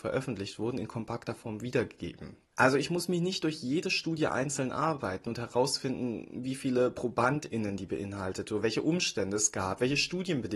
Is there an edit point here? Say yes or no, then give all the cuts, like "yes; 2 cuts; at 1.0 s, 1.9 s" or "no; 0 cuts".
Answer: no; 0 cuts